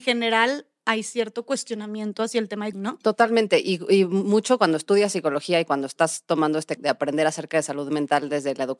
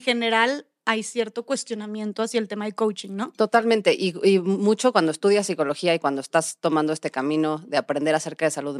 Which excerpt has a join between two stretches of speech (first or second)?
first